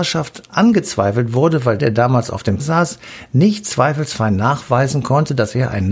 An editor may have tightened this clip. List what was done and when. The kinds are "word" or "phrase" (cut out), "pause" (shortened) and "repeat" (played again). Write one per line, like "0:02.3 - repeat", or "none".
0:01.8 - word
0:02.6 - word